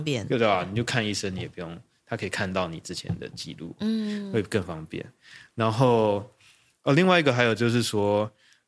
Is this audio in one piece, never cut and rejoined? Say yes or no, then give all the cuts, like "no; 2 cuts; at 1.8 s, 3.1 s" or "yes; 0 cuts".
yes; 0 cuts